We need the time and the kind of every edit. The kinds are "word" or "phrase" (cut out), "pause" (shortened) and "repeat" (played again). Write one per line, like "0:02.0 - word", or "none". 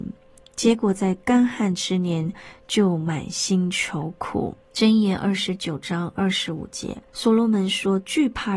0:04.6 - pause
0:07.1 - pause